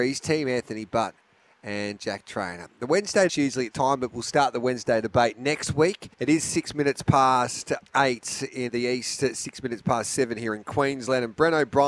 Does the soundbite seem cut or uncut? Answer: cut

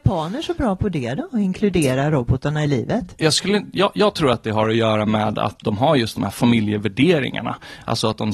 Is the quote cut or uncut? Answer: uncut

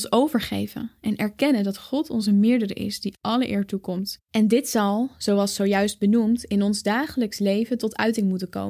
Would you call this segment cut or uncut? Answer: cut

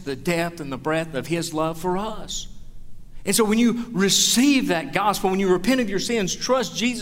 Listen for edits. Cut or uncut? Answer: uncut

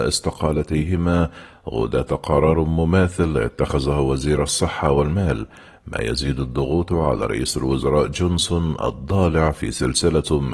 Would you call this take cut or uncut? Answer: uncut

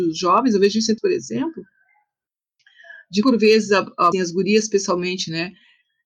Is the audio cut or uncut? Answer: cut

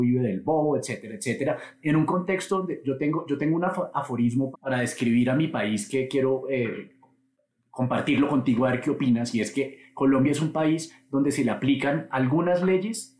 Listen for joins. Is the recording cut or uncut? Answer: cut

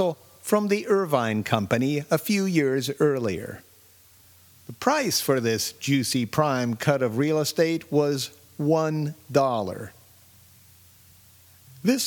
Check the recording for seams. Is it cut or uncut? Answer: uncut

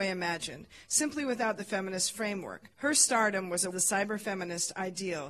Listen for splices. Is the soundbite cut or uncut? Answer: cut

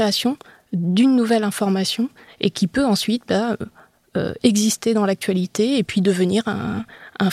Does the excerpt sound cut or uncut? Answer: uncut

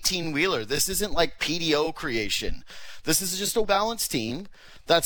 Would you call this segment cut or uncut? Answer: cut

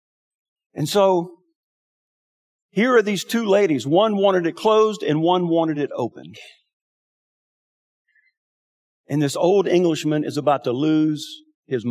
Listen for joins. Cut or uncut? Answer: uncut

